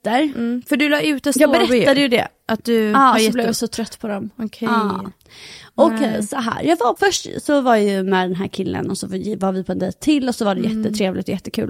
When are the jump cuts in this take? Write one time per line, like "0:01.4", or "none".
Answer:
0:07.0